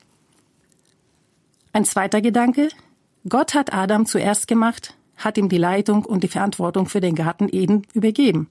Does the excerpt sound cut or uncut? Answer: uncut